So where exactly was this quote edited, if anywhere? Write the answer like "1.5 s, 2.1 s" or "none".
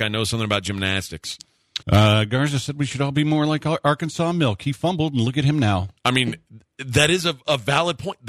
1.8 s, 6.0 s

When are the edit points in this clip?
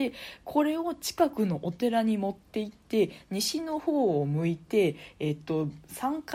none

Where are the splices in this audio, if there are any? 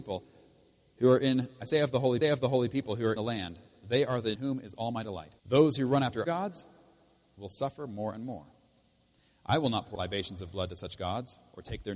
2.2 s, 3.2 s, 4.3 s, 5.4 s, 6.2 s, 9.9 s

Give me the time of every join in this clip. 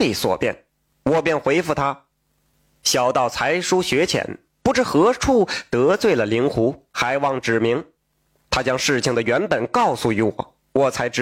none

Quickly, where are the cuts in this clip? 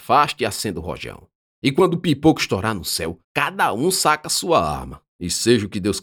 1.5 s, 3.2 s, 5.1 s

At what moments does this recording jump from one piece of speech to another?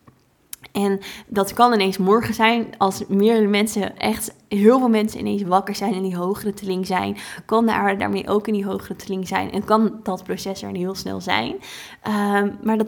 none

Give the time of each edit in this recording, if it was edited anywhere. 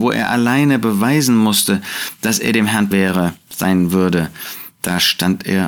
2.9 s

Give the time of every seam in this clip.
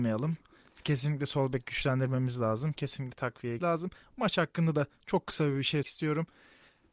3.6 s, 5.8 s

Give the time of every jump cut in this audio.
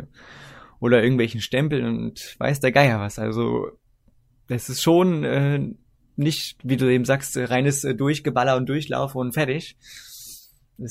none

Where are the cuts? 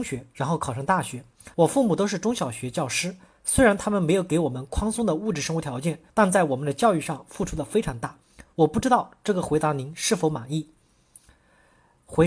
1.5 s, 6.1 s

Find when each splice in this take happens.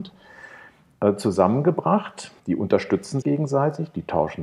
2.4 s, 3.2 s

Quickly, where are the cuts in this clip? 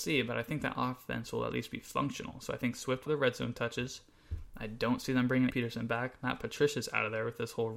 3.1 s, 5.5 s

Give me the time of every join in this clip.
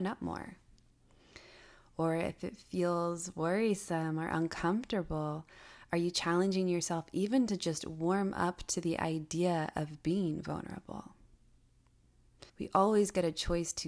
12.5 s

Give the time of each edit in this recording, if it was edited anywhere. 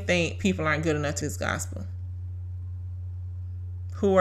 1.2 s

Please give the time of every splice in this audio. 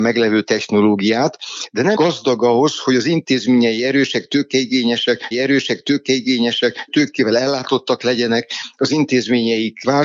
1.9 s, 5.3 s

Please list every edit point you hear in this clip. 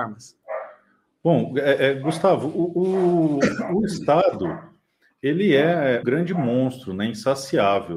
6.0 s

